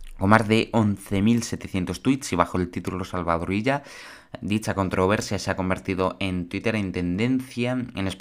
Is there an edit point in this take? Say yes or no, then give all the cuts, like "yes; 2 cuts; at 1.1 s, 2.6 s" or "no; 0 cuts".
no; 0 cuts